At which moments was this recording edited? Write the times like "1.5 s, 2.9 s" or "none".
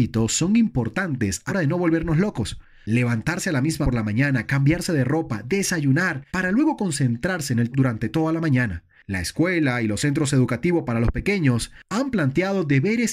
1.5 s, 3.8 s, 6.3 s, 7.7 s